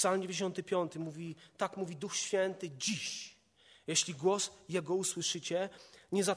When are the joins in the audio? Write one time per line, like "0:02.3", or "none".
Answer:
none